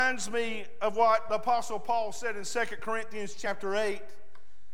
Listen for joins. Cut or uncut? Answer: uncut